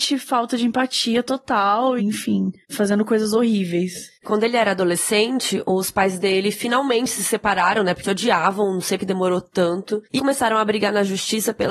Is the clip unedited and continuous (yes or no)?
no